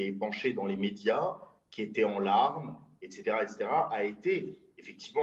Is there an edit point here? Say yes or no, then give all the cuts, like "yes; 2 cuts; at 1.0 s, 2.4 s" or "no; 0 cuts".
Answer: no; 0 cuts